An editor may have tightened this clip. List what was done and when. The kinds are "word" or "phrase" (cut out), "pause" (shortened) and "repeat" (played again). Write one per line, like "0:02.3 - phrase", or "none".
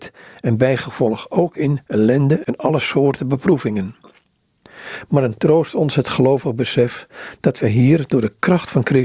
none